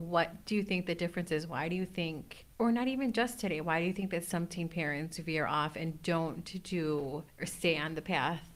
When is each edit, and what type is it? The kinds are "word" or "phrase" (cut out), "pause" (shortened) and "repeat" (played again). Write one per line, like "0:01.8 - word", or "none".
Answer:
0:02.5 - pause
0:07.3 - pause